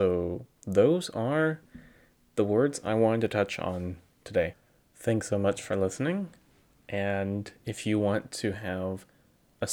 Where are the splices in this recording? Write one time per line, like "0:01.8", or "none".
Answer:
none